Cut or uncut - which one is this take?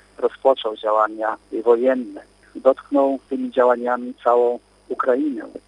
uncut